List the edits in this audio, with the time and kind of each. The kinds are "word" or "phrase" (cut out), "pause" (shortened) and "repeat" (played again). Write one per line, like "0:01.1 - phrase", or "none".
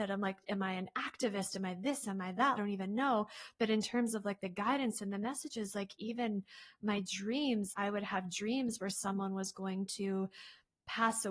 0:02.6 - phrase
0:07.7 - word